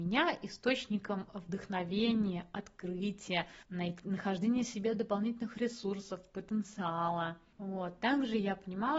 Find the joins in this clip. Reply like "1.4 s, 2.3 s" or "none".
3.6 s, 7.5 s